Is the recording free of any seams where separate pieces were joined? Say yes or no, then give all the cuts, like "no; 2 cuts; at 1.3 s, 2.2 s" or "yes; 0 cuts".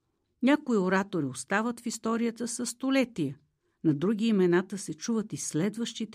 yes; 0 cuts